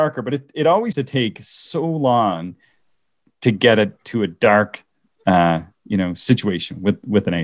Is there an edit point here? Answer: yes; 1 cut; at 0.9 s

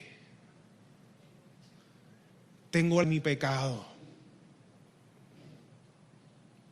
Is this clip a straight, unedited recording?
no; 1 cut; at 3.0 s

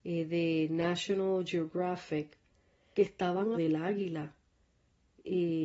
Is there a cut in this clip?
yes; 2 cuts; at 2.9 s, 3.5 s

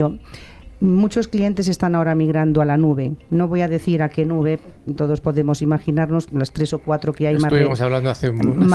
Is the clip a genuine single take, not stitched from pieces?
no; 1 cut; at 6.3 s

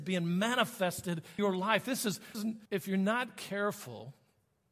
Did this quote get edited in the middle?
yes; 3 cuts; at 1.4 s, 2.3 s, 2.7 s

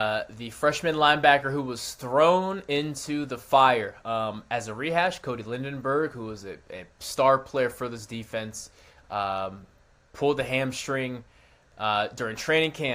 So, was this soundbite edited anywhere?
no; 0 cuts

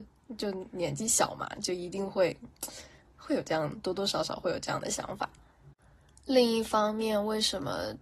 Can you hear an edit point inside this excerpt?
no; 0 cuts

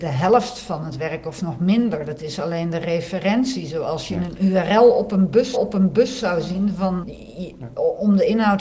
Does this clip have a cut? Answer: yes; 2 cuts; at 5.5 s, 7.0 s

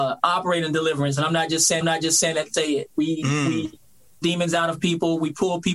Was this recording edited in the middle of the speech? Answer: yes; 3 cuts; at 1.8 s, 2.5 s, 4.2 s

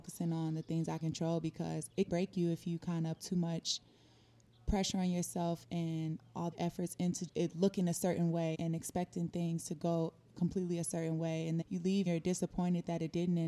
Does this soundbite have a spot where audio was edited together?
yes; 9 cuts; at 1.0 s, 2.1 s, 3.2 s, 5.6 s, 6.5 s, 7.3 s, 8.5 s, 11.6 s, 12.1 s

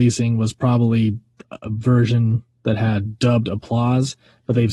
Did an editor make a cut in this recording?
no; 0 cuts

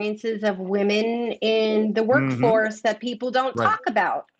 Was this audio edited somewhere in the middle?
no; 0 cuts

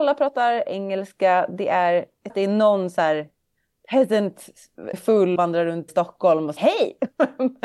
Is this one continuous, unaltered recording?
no; 5 cuts; at 2.3 s, 4.9 s, 5.4 s, 5.9 s, 6.6 s

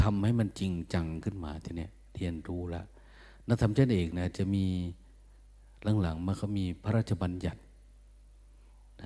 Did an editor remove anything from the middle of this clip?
no; 0 cuts

